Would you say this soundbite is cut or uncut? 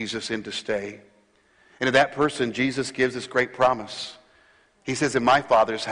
uncut